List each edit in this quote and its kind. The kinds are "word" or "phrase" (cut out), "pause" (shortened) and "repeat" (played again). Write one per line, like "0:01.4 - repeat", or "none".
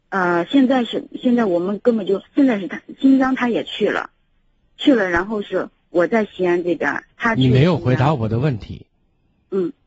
0:02.3 - pause
0:07.1 - pause